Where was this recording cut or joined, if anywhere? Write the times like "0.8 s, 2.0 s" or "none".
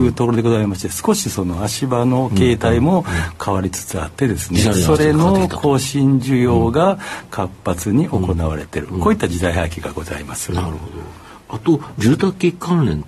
4.7 s